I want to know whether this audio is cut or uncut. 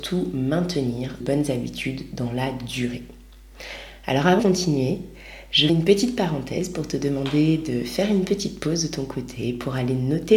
cut